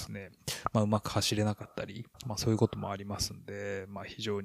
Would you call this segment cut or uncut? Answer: cut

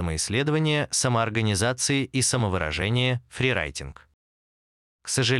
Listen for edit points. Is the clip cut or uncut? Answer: uncut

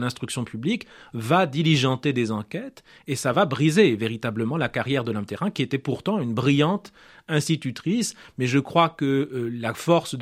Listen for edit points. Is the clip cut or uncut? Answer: uncut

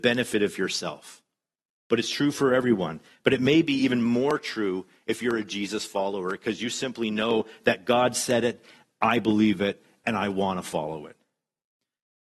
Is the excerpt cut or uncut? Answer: uncut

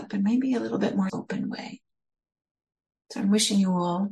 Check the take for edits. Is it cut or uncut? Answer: cut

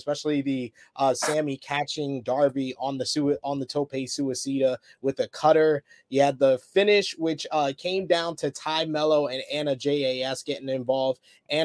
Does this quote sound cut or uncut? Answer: uncut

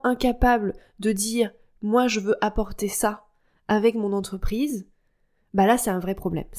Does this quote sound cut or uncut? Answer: uncut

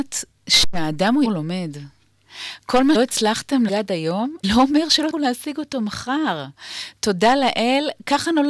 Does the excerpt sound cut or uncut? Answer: cut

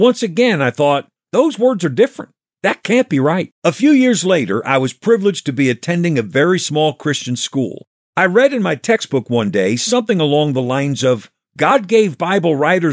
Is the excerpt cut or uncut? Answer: cut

